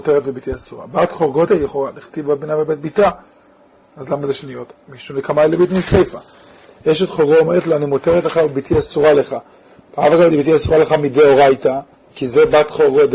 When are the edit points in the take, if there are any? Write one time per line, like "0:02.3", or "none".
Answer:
0:01.5